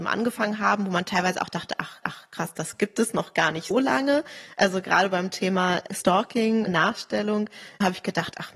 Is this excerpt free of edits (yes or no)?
no